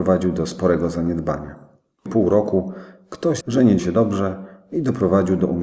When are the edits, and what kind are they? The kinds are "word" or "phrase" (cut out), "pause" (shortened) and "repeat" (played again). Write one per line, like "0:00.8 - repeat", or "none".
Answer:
0:02.1 - word
0:03.4 - phrase
0:03.8 - word